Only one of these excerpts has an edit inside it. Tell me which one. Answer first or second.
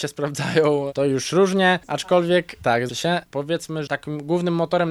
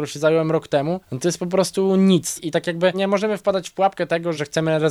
first